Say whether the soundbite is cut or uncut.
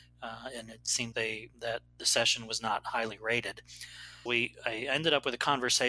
cut